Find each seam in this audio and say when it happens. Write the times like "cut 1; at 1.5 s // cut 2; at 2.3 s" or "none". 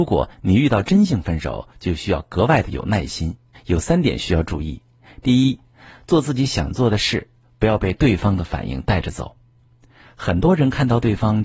cut 1; at 3.5 s